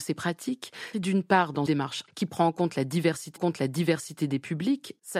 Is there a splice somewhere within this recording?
yes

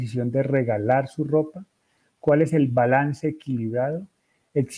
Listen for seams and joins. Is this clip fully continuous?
yes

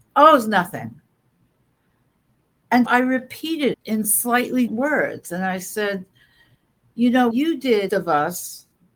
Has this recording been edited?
yes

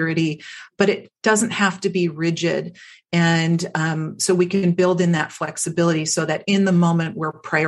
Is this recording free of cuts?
yes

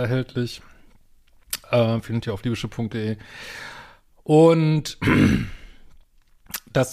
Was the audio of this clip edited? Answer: no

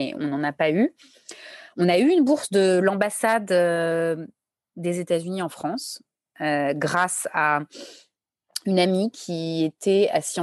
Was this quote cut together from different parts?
no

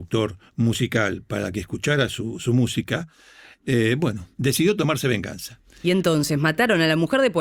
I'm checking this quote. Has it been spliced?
no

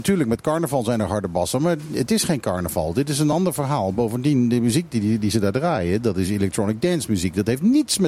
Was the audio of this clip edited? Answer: no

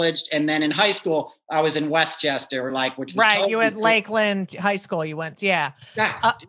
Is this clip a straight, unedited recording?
yes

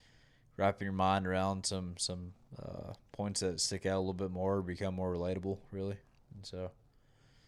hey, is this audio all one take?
yes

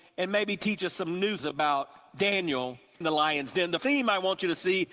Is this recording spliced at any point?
yes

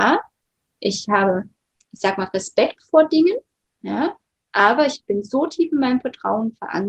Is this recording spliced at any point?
no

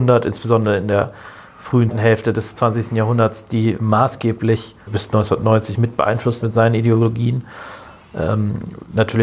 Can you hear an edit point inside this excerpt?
yes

